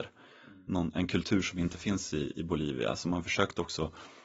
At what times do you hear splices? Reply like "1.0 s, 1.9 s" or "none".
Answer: none